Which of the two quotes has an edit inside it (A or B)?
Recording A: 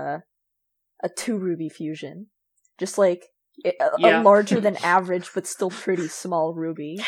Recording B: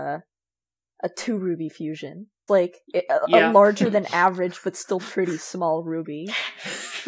B